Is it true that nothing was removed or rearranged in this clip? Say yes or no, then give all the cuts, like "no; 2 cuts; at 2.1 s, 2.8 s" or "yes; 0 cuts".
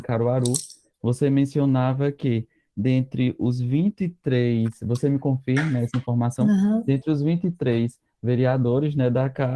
yes; 0 cuts